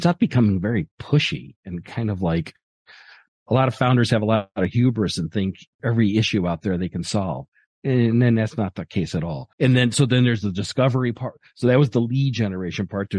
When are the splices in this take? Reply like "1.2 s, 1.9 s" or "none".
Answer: 5.7 s, 9.5 s

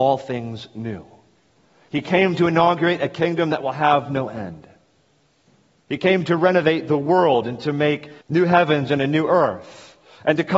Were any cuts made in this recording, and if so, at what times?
8.2 s

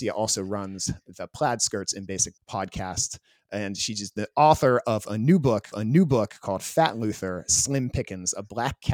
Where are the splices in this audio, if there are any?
2.4 s, 5.7 s

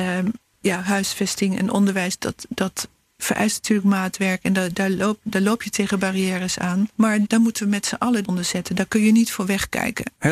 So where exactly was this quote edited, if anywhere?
7.3 s, 8.2 s

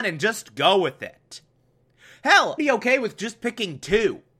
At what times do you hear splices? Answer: 2.6 s

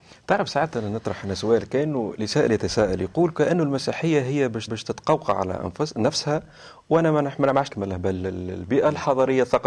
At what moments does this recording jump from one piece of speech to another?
4.7 s, 7.7 s

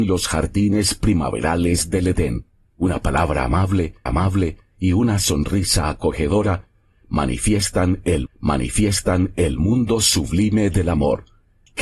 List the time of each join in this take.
2.5 s, 4.1 s, 8.3 s

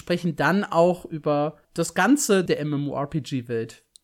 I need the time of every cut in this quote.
1.6 s, 2.5 s

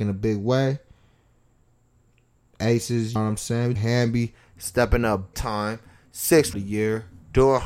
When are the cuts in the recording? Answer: 3.2 s, 3.8 s, 5.3 s, 6.5 s

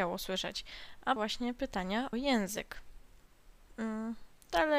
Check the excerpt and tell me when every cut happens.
1.2 s, 2.1 s

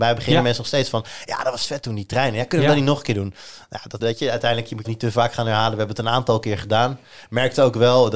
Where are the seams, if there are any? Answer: 4.0 s, 4.8 s

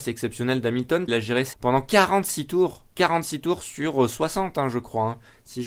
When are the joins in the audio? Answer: 1.1 s, 1.5 s, 2.9 s

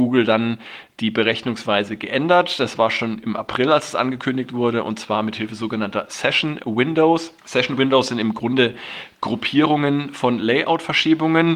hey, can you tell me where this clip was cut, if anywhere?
7.4 s

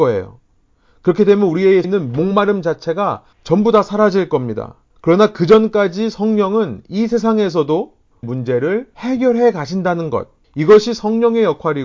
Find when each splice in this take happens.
1.8 s, 3.3 s, 4.9 s, 8.2 s, 10.4 s

